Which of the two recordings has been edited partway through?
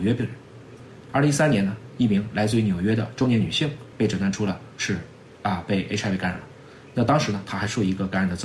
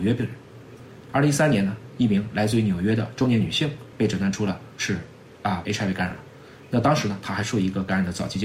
second; 1 cut; at 5.6 s

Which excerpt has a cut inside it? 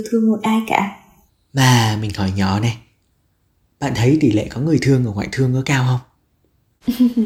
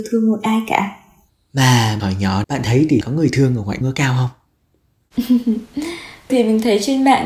second; 5 cuts; at 2.0 s, 2.4 s, 3.0 s, 3.8 s, 6.3 s

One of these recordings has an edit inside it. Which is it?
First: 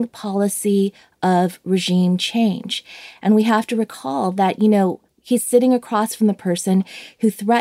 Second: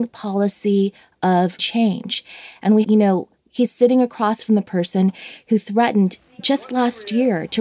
second; 2 cuts; at 1.6 s, 2.8 s

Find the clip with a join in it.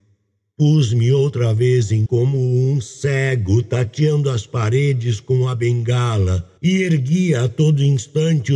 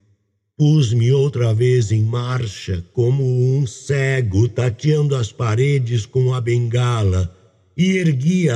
first; 2 cuts; at 2.1 s, 6.6 s

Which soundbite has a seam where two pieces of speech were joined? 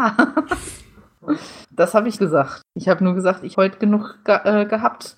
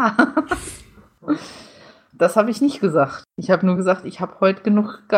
first; 3 cuts; at 1.6 s, 2.2 s, 3.5 s

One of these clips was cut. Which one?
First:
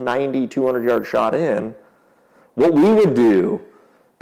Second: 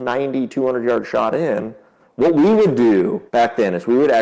second; 2 cuts; at 2.0 s, 3.3 s

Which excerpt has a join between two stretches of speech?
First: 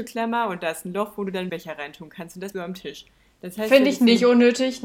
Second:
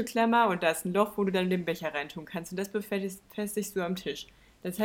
first; 2 cuts; at 1.5 s, 2.5 s

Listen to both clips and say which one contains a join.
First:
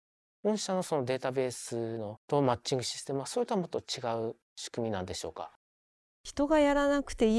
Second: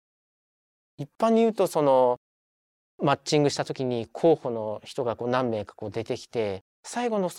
first; 1 cut; at 2.2 s

